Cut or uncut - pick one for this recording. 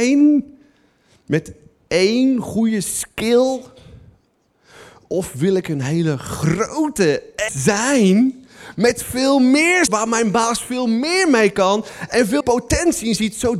cut